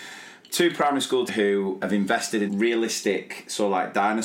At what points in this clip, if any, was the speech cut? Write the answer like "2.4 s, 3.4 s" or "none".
1.3 s, 1.8 s, 2.5 s